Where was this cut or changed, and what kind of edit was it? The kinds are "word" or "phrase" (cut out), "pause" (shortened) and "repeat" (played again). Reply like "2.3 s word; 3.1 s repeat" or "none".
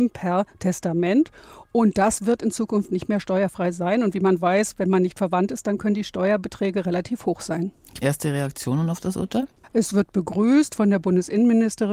8.0 s word; 9.6 s pause